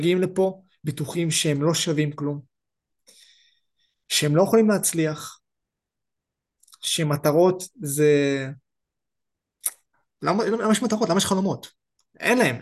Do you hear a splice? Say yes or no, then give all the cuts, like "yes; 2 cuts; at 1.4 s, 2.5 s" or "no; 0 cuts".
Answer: no; 0 cuts